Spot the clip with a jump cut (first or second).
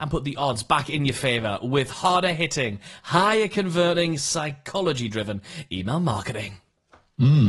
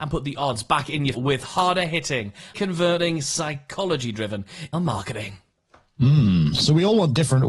second